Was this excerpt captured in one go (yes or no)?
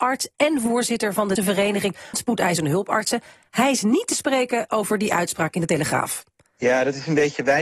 no